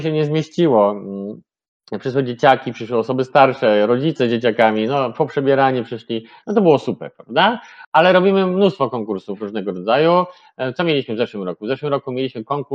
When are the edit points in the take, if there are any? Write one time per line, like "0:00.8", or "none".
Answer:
none